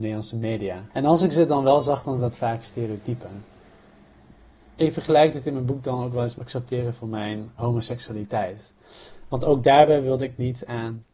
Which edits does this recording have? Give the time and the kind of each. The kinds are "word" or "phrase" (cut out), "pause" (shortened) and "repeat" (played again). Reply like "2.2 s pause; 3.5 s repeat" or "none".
0.9 s pause; 2.2 s word; 6.4 s word; 7.6 s word